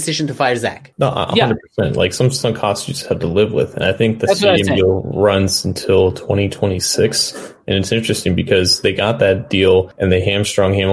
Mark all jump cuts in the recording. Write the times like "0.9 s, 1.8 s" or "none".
none